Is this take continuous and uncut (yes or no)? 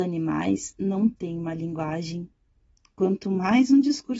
yes